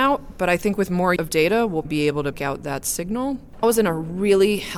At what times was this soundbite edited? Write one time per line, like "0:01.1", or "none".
0:01.2
0:01.8
0:02.3
0:03.6